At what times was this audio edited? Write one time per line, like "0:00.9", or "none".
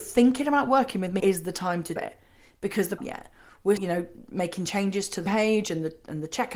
0:01.2
0:02.0
0:03.0
0:03.8
0:05.3